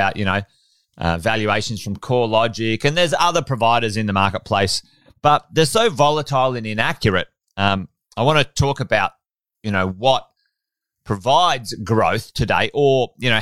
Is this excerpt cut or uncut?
uncut